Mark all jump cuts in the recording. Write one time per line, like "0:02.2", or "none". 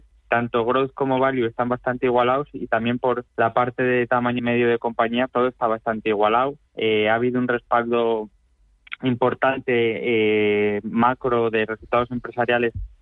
0:03.3
0:04.4
0:05.3
0:06.7